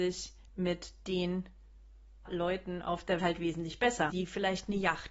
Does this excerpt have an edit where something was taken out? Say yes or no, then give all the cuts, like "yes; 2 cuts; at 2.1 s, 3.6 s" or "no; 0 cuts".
yes; 3 cuts; at 2.2 s, 3.2 s, 4.1 s